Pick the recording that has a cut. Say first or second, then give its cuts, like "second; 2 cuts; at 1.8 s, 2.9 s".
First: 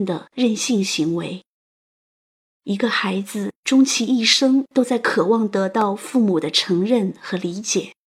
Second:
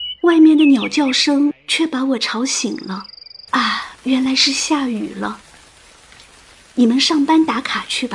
second; 1 cut; at 3.5 s